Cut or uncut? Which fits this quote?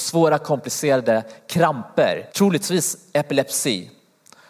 cut